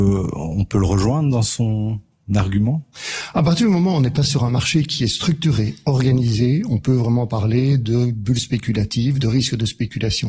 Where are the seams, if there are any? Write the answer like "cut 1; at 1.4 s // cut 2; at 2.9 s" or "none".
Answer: none